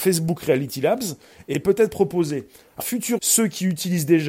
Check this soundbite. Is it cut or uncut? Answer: cut